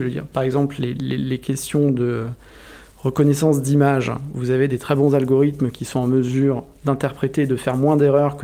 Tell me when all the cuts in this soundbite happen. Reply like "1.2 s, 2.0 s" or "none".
none